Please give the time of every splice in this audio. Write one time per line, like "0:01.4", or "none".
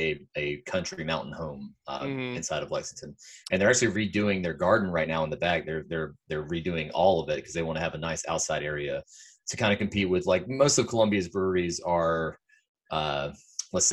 none